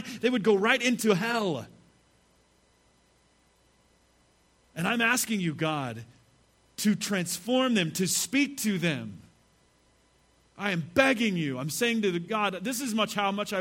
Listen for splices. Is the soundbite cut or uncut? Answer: uncut